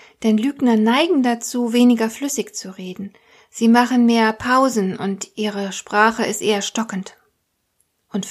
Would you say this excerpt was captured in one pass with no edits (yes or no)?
yes